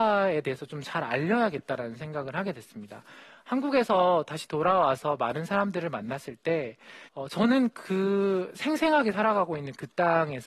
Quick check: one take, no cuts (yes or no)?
no